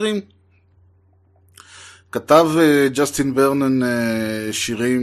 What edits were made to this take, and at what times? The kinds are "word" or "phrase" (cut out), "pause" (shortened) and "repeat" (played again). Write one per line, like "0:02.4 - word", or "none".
none

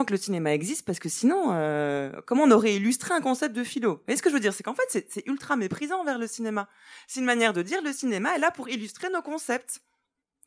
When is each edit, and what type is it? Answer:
none

